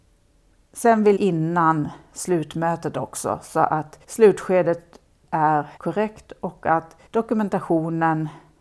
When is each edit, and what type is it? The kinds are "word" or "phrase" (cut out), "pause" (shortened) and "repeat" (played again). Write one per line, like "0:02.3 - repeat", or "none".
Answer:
0:01.2 - phrase
0:04.0 - pause
0:05.8 - pause
0:07.1 - pause

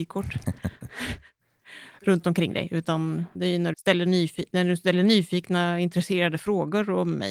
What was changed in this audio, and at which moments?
0:03.3 - word
0:03.7 - word

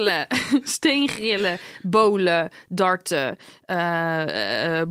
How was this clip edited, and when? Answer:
none

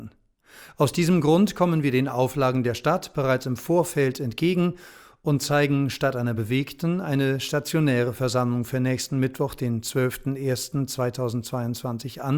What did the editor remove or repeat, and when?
none

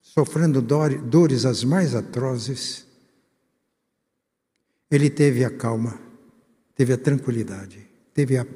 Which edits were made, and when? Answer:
none

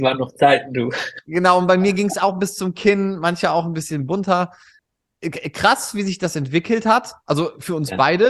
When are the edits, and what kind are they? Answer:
none

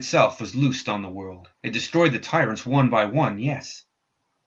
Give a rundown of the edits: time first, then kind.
0:01.5 - pause

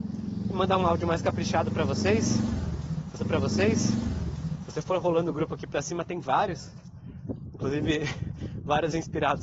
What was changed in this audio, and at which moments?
0:03.2 - repeat

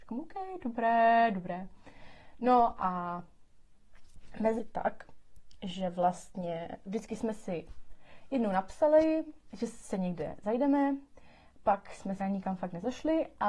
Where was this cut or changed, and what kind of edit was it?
0:04.6 - phrase
0:06.9 - word
0:12.2 - word

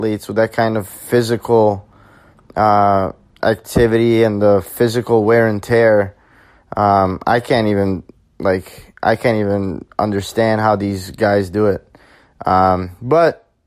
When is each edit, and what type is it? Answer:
none

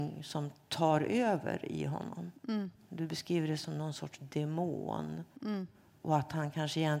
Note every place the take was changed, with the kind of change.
none

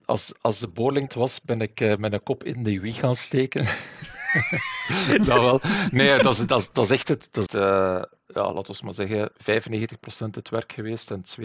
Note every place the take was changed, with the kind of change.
0:01.1 - phrase
0:07.5 - word
0:09.4 - pause

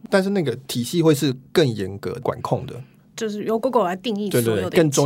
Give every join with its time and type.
none

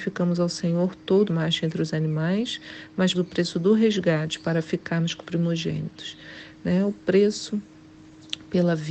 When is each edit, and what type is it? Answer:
0:01.3 - phrase
0:03.1 - word
0:05.2 - word

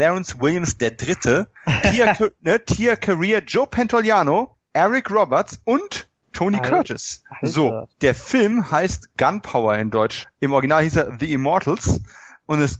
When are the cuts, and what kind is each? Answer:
0:07.9 - pause

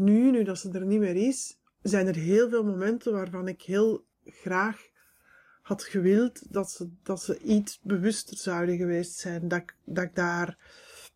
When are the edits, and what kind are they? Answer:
0:01.7 - pause
0:04.1 - pause

